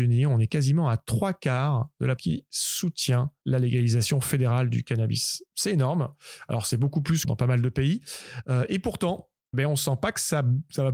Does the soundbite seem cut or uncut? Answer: cut